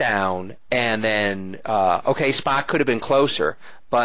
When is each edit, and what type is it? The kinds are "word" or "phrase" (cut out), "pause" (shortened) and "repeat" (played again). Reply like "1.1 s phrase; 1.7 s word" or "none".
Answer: none